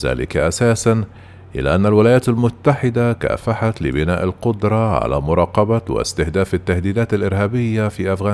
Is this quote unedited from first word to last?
yes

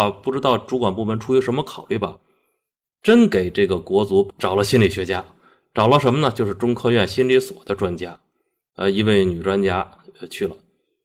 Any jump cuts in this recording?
no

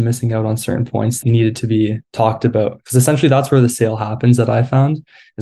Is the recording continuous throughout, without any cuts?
no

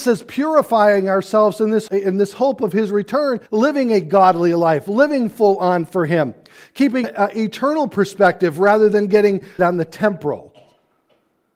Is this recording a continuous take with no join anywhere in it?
no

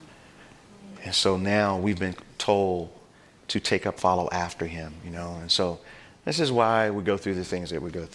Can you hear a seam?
yes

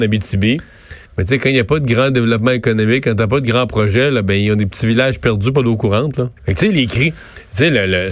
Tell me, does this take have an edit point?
yes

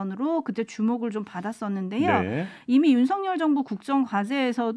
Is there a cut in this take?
no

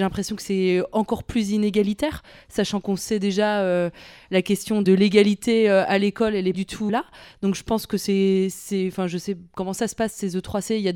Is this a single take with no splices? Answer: no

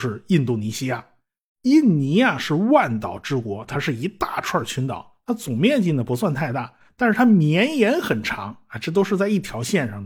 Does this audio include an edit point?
no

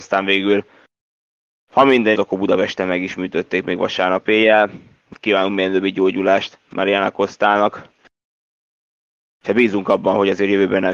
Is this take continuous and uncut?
no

